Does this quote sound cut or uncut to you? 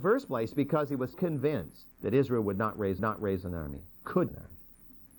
cut